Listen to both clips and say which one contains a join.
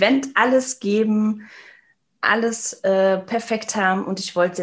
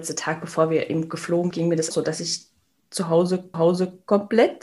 second; 3 cuts; at 1.5 s, 1.9 s, 3.5 s

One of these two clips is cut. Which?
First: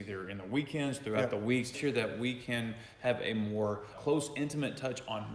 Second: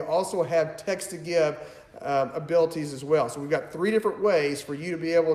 first; 2 cuts; at 1.7 s, 3.9 s

